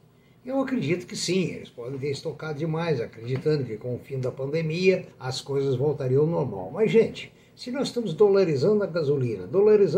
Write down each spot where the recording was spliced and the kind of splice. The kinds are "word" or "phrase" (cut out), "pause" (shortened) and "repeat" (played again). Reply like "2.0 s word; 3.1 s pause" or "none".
5.1 s pause